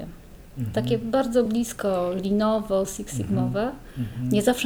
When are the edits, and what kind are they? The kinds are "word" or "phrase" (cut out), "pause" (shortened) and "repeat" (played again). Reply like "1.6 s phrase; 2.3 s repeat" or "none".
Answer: none